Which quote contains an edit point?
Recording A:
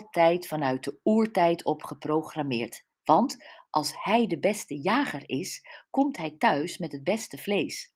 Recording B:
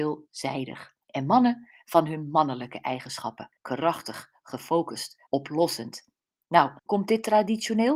B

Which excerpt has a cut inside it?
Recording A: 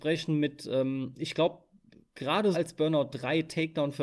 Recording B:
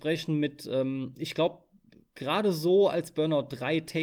A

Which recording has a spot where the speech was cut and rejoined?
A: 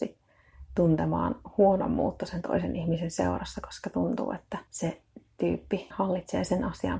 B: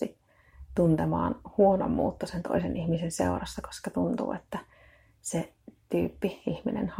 A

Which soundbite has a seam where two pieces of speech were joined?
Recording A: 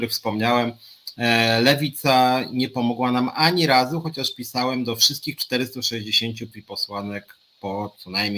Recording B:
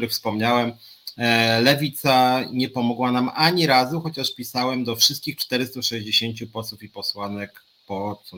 A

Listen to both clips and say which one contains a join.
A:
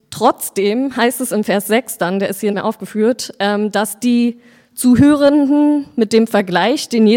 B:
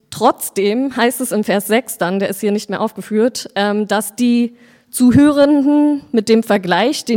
A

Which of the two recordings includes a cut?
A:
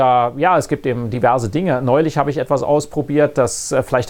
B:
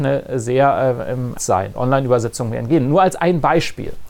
B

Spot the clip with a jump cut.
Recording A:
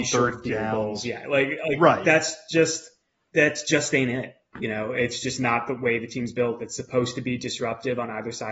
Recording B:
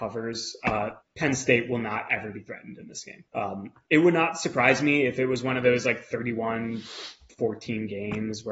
B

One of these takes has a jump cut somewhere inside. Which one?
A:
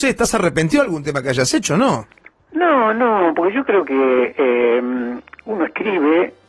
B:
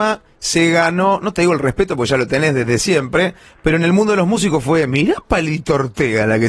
A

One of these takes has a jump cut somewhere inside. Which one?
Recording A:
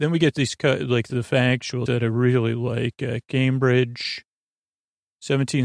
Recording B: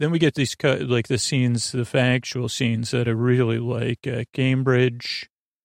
A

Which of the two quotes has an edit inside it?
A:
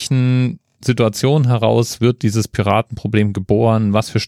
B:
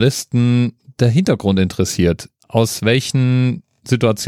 B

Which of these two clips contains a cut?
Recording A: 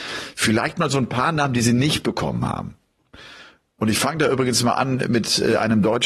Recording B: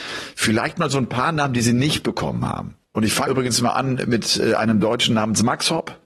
B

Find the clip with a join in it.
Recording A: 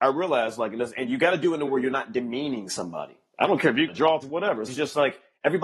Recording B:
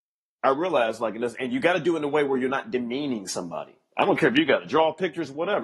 A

